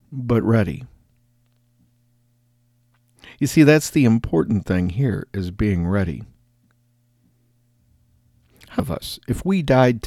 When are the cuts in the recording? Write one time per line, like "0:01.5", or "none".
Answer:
0:08.8

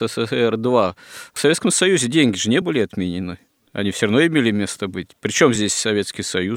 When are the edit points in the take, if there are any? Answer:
none

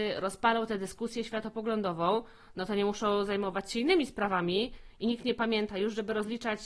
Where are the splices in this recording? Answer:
none

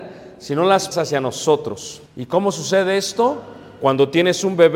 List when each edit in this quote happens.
0:00.9
0:02.1

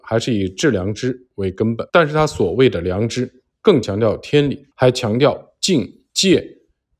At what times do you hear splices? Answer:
0:01.9
0:04.7
0:06.1

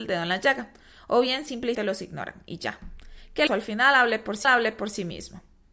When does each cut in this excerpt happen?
0:01.7
0:03.5
0:04.4

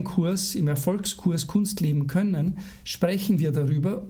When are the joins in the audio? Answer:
none

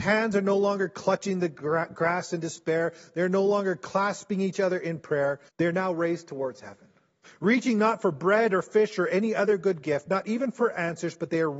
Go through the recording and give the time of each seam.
0:05.5
0:07.2

